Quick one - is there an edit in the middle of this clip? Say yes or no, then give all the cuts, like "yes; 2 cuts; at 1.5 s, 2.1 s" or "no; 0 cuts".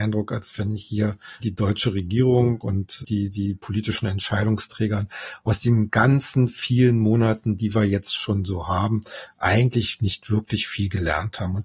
yes; 2 cuts; at 1.4 s, 3.0 s